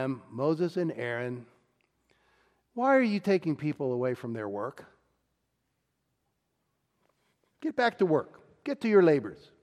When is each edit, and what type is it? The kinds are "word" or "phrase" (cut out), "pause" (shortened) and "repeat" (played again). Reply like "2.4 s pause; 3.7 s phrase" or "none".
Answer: none